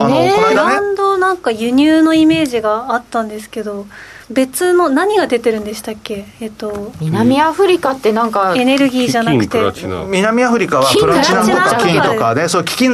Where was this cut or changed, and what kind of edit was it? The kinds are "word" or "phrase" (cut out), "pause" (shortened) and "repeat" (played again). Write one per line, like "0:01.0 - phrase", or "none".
0:04.2 - pause
0:06.3 - pause